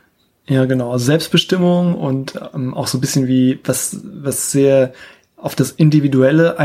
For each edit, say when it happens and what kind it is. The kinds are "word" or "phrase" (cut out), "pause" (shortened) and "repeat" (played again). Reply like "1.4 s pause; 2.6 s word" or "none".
none

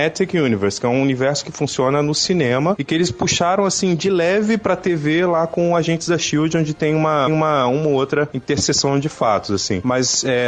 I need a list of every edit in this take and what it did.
7.3 s repeat

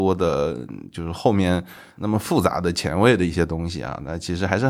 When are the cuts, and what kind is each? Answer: none

